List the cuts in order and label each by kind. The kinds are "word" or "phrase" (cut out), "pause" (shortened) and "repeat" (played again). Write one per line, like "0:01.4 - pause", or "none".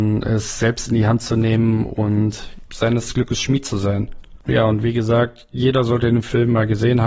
0:03.1 - word